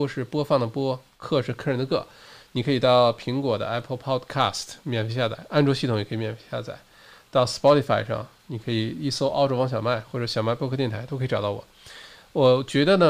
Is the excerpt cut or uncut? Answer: uncut